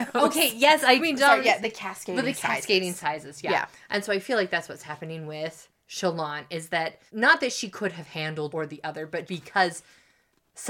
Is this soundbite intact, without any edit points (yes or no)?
no